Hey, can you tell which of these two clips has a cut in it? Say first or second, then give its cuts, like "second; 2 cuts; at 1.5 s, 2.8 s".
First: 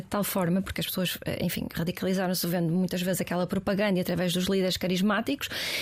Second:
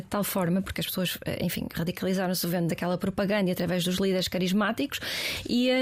second; 1 cut; at 2.7 s